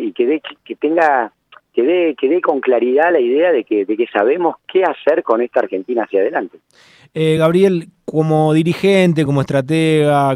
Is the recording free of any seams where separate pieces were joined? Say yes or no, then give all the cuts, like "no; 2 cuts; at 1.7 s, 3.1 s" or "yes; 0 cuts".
yes; 0 cuts